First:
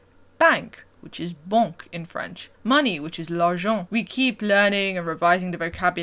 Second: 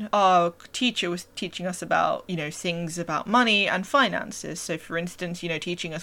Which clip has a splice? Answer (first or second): first